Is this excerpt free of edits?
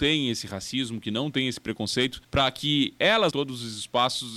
no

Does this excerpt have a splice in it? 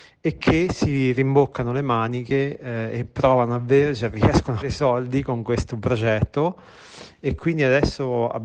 yes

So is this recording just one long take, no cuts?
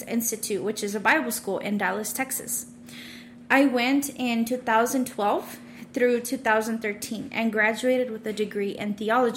yes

